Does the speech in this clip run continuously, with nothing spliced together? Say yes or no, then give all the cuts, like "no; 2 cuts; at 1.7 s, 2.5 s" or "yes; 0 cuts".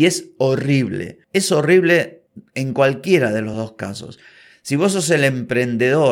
yes; 0 cuts